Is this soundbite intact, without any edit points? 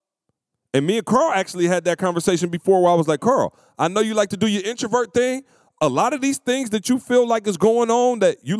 yes; 0 cuts

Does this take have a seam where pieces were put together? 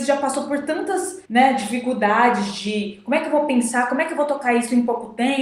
yes; 1 cut; at 1.2 s

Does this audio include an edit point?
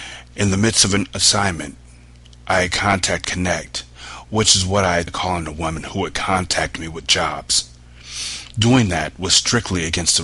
yes; 2 cuts; at 3.2 s, 5.1 s

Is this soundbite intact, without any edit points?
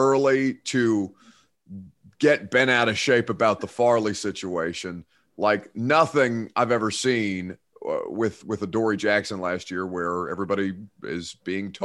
yes; 0 cuts

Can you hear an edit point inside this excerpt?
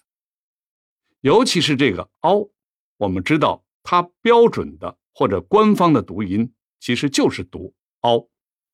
yes; 1 cut; at 3.7 s

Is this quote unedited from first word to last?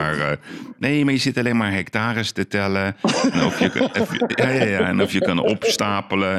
yes; 0 cuts

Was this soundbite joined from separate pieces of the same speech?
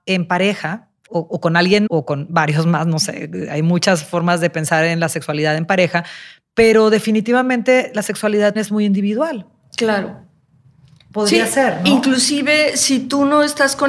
yes; 3 cuts; at 1.1 s, 1.9 s, 8.6 s

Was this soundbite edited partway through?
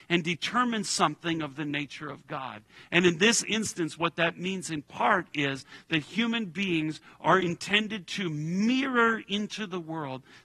no; 0 cuts

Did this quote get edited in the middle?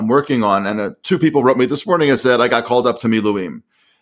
no; 0 cuts

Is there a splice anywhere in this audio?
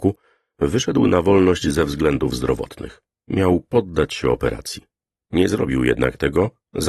no; 0 cuts

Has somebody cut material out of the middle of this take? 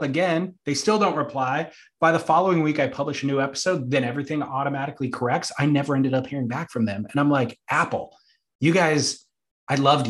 no; 0 cuts

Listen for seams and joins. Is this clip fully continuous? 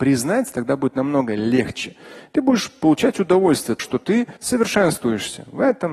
no; 2 cuts; at 3.8 s, 4.4 s

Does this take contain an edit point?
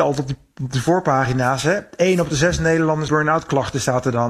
yes; 1 cut; at 3.1 s

